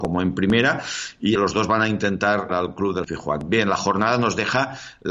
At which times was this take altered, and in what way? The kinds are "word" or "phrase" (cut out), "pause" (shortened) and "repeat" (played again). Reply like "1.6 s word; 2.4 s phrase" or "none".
1.4 s word; 2.5 s word; 3.0 s word